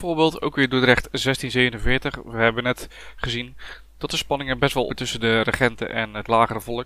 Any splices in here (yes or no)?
yes